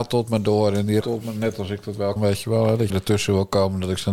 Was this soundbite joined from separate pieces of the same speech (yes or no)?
yes